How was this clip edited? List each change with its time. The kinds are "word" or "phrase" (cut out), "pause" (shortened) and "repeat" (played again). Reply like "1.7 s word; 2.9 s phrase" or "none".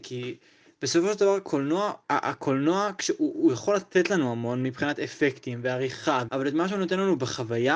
2.0 s pause; 6.3 s word